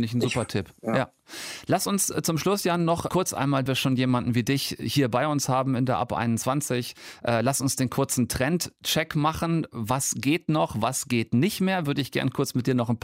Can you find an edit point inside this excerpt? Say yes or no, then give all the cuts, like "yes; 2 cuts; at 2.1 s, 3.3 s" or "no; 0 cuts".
yes; 2 cuts; at 3.1 s, 3.7 s